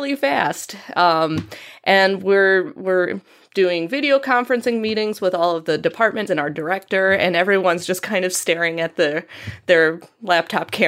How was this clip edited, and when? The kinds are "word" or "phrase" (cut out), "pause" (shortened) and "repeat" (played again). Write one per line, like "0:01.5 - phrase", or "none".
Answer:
0:06.3 - word